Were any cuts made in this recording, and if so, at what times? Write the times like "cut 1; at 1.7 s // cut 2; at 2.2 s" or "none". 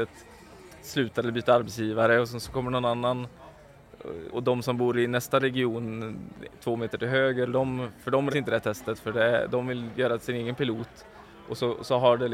cut 1; at 4.3 s // cut 2; at 8.3 s